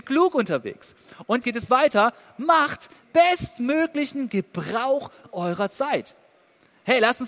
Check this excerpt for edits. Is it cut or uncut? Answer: cut